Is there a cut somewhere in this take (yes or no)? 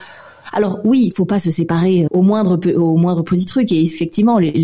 yes